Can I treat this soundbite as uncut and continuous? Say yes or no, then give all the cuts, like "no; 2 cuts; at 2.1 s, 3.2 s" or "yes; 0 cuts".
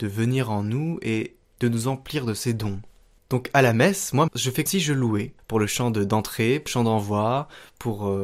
no; 3 cuts; at 4.3 s, 4.7 s, 6.7 s